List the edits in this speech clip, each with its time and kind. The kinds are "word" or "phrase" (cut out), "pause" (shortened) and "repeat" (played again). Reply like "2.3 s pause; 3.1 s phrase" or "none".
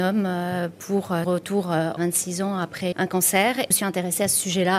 1.2 s word; 2.0 s phrase; 2.9 s word; 3.7 s phrase